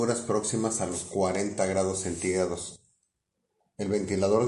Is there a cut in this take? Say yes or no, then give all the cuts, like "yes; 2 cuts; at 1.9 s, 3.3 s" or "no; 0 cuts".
no; 0 cuts